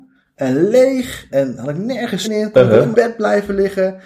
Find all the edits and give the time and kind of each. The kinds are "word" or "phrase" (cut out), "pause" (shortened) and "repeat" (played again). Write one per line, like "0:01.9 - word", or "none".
0:01.3 - word
0:02.2 - word
0:02.9 - phrase